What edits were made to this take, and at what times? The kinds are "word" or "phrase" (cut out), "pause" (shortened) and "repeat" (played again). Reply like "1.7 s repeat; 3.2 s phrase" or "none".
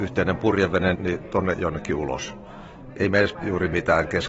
1.0 s word; 1.5 s word; 3.3 s word